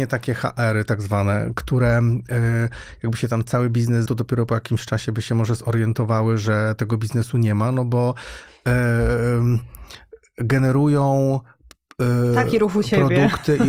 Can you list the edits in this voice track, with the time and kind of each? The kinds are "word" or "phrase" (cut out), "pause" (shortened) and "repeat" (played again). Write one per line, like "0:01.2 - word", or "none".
0:04.1 - word

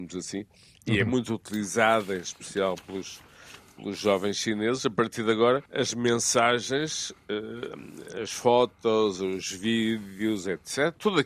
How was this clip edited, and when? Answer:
0:05.7 - pause

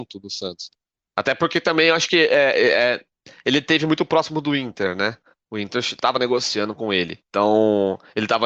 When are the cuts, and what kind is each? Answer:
none

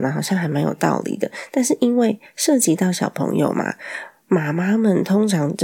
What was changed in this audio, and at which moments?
none

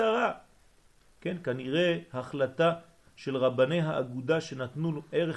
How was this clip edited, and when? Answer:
none

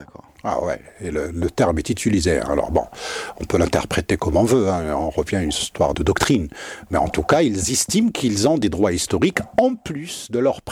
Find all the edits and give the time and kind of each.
none

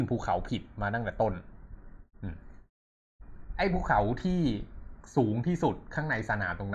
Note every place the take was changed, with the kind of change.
0:02.1 - pause

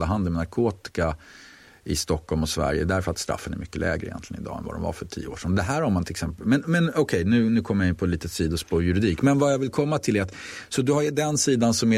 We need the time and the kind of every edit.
none

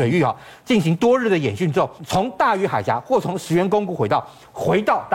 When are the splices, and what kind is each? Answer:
0:02.0 - pause

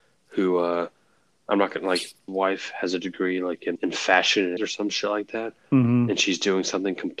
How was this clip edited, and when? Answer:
0:02.3 - phrase
0:03.8 - word
0:04.6 - word

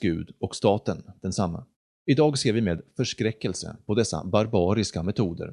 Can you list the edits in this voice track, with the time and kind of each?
0:01.7 - pause

